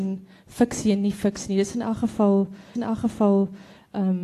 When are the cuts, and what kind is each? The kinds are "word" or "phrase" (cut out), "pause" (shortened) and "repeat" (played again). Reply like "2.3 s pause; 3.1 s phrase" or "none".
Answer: 2.7 s repeat